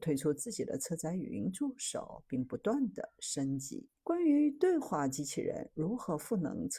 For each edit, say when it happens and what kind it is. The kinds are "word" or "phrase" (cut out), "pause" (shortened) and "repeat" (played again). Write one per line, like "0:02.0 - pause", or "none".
0:04.0 - pause